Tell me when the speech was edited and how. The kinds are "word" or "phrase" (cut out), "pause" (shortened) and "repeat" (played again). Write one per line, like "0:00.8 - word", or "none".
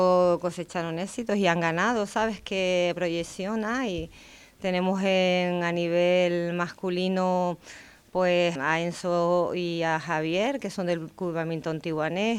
0:08.6 - word